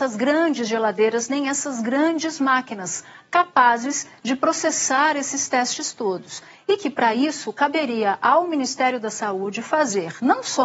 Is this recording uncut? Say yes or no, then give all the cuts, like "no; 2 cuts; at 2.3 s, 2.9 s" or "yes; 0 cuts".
yes; 0 cuts